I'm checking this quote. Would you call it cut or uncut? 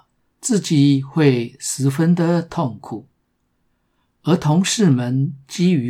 uncut